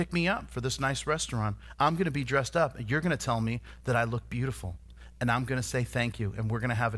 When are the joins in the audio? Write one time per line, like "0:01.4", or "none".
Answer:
none